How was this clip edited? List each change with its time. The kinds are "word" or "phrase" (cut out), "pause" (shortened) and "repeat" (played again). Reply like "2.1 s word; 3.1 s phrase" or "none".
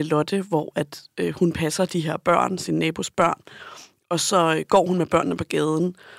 none